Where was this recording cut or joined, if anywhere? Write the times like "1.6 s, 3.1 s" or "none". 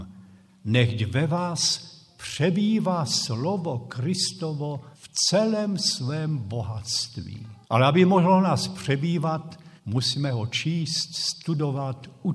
4.9 s, 7.6 s, 9.8 s